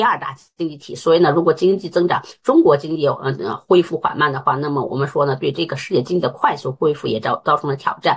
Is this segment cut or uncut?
uncut